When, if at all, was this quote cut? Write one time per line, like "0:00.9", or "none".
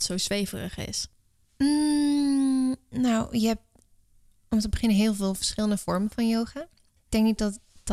none

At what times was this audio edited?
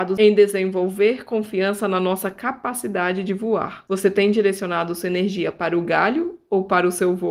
none

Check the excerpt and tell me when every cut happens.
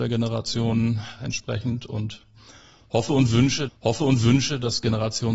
0:03.7

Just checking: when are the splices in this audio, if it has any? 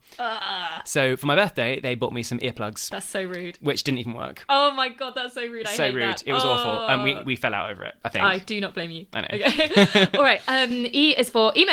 none

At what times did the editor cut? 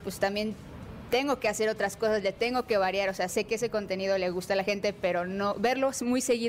none

